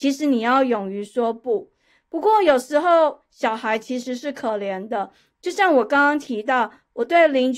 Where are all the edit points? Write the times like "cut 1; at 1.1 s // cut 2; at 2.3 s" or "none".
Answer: none